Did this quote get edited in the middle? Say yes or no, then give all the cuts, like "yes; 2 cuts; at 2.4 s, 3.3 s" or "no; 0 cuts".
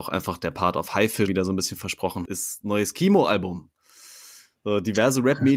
yes; 2 cuts; at 1.3 s, 2.3 s